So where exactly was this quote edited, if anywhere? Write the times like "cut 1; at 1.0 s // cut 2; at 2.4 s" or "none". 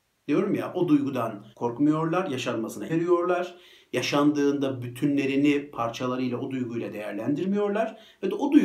cut 1; at 1.5 s // cut 2; at 2.9 s